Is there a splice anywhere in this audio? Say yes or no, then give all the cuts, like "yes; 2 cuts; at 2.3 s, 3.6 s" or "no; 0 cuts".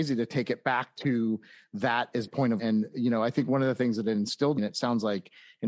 yes; 3 cuts; at 2.3 s, 2.6 s, 4.6 s